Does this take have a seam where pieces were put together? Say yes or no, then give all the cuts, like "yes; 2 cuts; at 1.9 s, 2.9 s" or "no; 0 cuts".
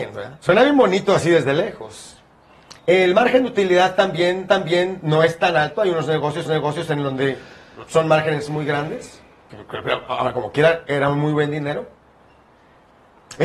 yes; 3 cuts; at 2.8 s, 4.5 s, 6.5 s